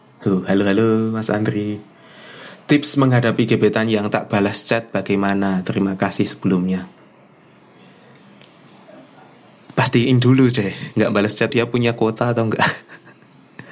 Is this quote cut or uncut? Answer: cut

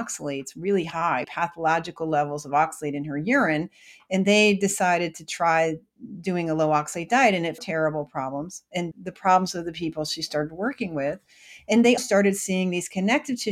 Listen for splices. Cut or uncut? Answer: cut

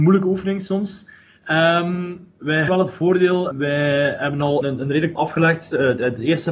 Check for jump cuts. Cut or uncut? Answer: cut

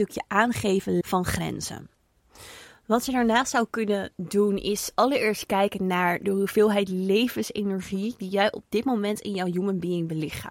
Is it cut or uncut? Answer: cut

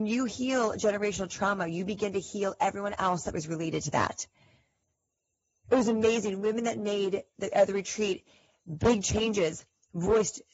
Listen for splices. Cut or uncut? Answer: uncut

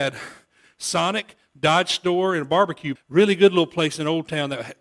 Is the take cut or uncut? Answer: cut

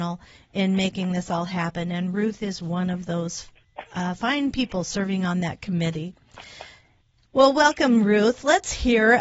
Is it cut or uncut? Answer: uncut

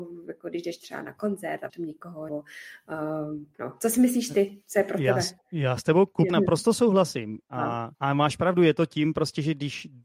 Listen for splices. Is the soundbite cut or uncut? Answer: cut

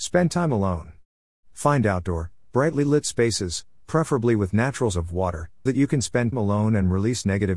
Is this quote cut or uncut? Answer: cut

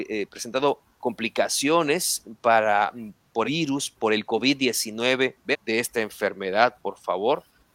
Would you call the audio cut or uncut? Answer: cut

